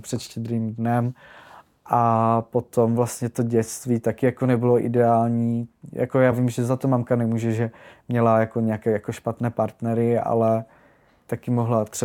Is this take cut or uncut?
uncut